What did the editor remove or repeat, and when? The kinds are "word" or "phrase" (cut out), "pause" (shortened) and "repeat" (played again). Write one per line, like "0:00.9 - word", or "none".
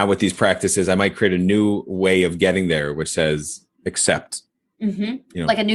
0:03.7 - pause

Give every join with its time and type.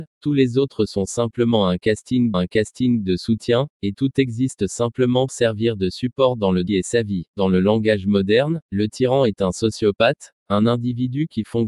0:02.3 - repeat
0:05.3 - word
0:06.7 - phrase
0:07.3 - pause

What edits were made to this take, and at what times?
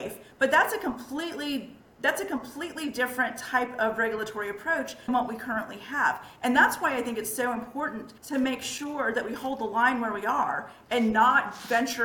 0:05.1 - word
0:08.2 - pause

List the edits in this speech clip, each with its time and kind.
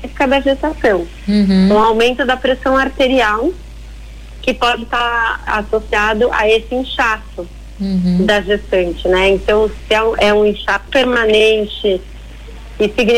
0:05.5 - word
0:09.8 - word
0:10.2 - word
0:10.9 - word

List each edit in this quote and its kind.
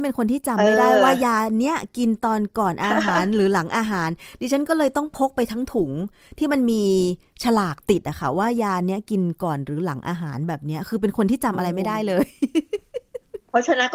none

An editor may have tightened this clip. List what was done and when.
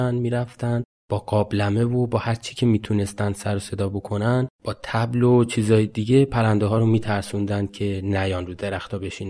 none

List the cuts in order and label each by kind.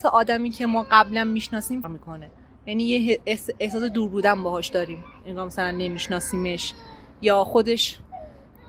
0:01.8 - word

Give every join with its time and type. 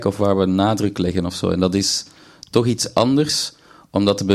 none

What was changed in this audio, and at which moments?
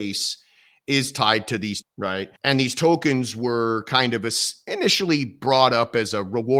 0:01.8 - word
0:02.4 - pause

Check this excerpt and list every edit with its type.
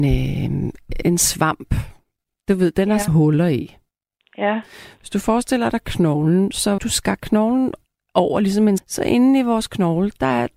0:01.0 - word
0:03.1 - word
0:06.8 - word
0:08.8 - word

